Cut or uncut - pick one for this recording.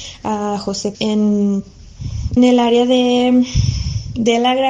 cut